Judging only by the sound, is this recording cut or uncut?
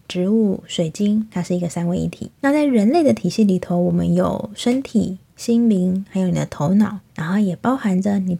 cut